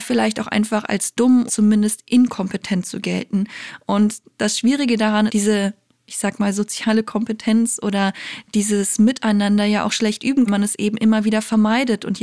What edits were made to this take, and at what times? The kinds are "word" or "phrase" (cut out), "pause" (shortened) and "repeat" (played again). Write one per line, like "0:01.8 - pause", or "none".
0:01.5 - word
0:05.3 - phrase
0:10.5 - phrase